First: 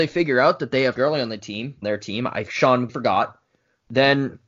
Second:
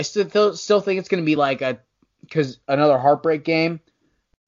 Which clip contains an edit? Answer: first; 4 cuts; at 1.0 s, 1.8 s, 2.5 s, 2.9 s

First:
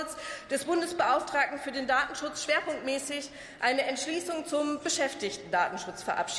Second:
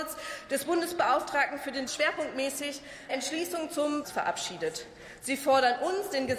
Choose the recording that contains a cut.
second; 3 cuts; at 1.9 s, 3.1 s, 4.0 s

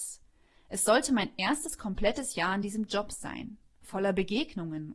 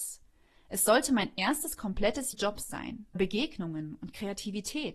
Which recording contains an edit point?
second; 2 cuts; at 2.3 s, 3.1 s

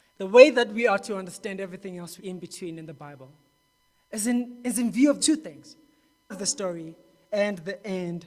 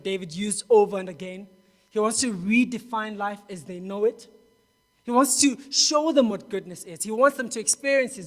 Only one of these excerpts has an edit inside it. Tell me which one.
first; 3 cuts; at 2.2 s, 5.2 s, 6.3 s

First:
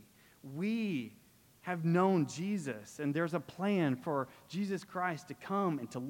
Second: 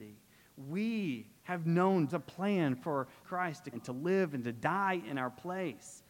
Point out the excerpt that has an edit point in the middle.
second; 4 cuts; at 1.4 s, 2.1 s, 3.2 s, 3.7 s

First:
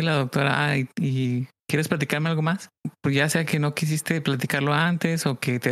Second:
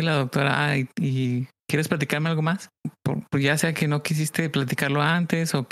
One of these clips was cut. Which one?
first; 1 cut; at 3.0 s

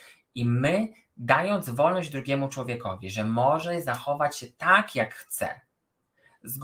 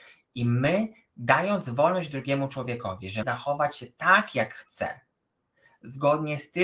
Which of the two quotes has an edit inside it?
second; 1 cut; at 3.2 s

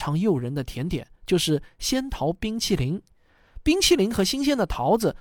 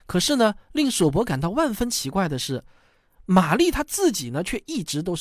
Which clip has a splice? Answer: first; 1 cut; at 1.2 s

